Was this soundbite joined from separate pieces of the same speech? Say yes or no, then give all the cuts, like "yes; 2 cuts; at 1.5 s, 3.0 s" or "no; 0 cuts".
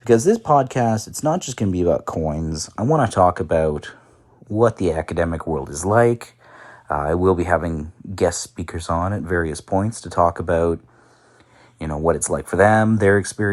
no; 0 cuts